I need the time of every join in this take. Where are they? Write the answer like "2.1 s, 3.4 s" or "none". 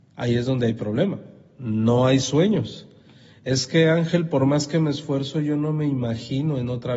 none